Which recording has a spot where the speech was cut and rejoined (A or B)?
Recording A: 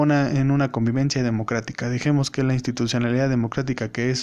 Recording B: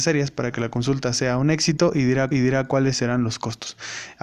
B